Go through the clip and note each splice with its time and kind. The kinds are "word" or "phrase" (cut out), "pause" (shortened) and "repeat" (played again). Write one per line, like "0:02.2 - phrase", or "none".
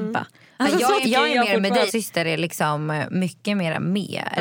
0:01.0 - word
0:01.9 - phrase